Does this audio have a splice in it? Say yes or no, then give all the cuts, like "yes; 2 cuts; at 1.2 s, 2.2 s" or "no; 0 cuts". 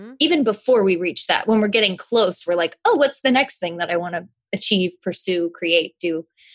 no; 0 cuts